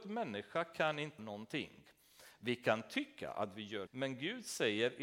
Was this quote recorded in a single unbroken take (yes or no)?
no